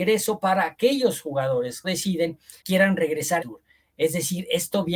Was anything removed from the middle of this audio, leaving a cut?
yes; 3 cuts; at 1.8 s, 2.6 s, 3.4 s

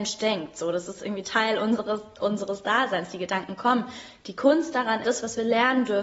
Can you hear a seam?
yes; 1 cut; at 5.0 s

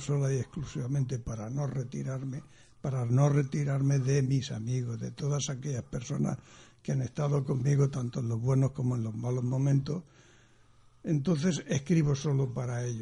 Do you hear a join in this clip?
no; 0 cuts

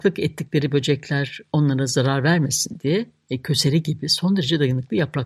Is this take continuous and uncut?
yes; 0 cuts

